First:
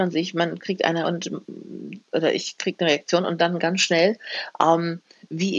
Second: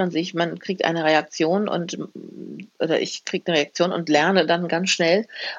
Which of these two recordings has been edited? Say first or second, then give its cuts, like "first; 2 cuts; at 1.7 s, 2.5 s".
first; 2 cuts; at 1.0 s, 3.4 s